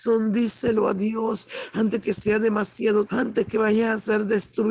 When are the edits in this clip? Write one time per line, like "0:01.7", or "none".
0:03.1